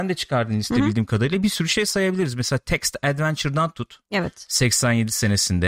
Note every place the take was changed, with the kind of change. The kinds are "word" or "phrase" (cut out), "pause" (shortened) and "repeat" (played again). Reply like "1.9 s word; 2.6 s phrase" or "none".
none